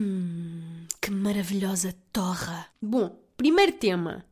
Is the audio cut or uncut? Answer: cut